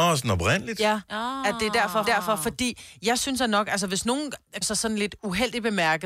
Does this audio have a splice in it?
yes; 2 cuts; at 2.0 s, 4.6 s

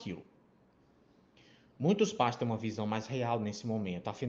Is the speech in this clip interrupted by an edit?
no; 0 cuts

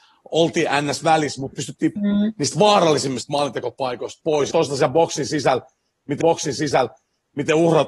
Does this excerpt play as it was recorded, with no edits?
no; 4 cuts; at 1.5 s, 2.0 s, 4.5 s, 6.2 s

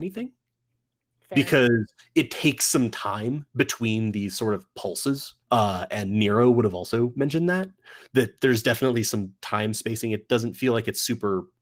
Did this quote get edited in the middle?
yes; 1 cut; at 5.4 s

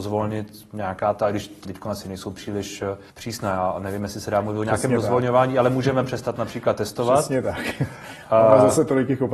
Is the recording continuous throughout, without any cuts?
no; 2 cuts; at 1.7 s, 3.1 s

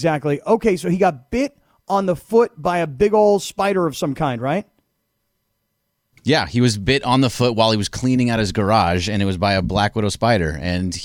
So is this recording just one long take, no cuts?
yes; 0 cuts

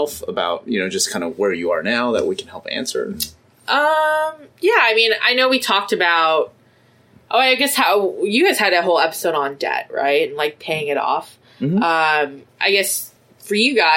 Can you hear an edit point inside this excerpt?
yes; 2 cuts; at 4.5 s, 12.5 s

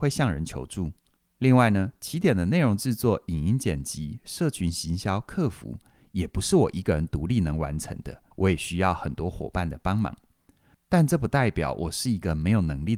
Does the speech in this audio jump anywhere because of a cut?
yes; 1 cut; at 8.3 s

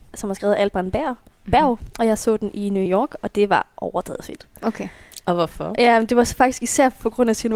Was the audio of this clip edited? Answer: no; 0 cuts

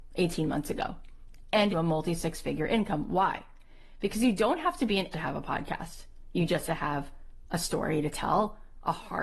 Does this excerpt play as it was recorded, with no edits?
no; 3 cuts; at 1.7 s, 5.1 s, 6.7 s

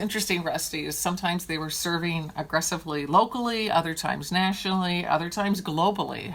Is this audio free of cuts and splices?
yes; 0 cuts

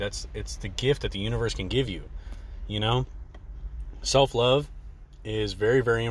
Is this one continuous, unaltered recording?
yes; 0 cuts

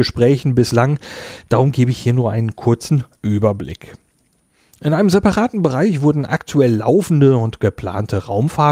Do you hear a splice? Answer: no; 0 cuts

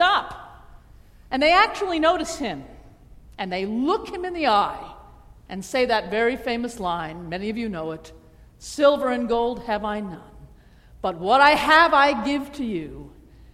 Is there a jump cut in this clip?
no; 0 cuts

